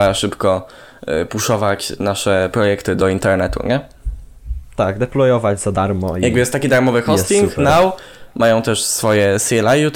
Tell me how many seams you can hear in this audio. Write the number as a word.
zero